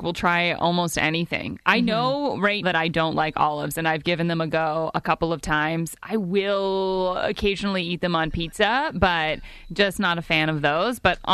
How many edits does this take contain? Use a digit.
1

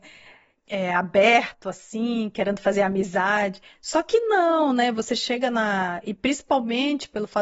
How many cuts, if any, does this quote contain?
0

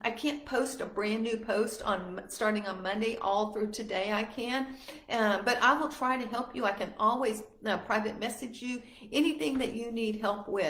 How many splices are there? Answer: 0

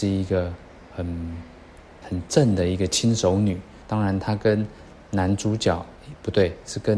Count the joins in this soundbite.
1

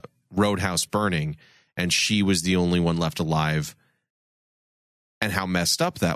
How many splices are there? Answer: 0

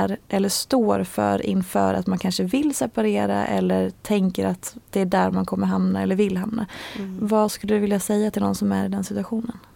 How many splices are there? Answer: 0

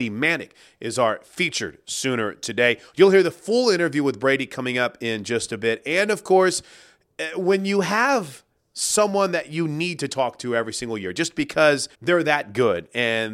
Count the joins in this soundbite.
1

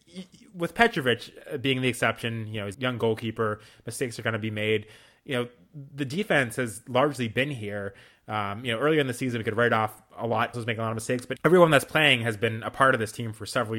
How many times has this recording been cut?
3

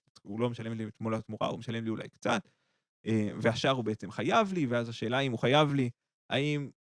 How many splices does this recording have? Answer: 0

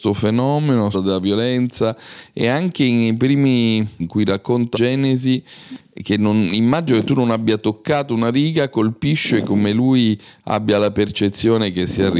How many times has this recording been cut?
3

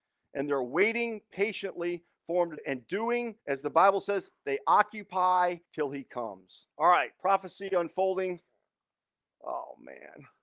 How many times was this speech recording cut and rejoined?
4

